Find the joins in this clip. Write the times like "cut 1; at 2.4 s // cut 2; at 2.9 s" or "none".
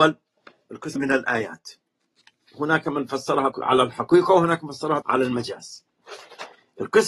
cut 1; at 1.0 s // cut 2; at 3.5 s // cut 3; at 5.0 s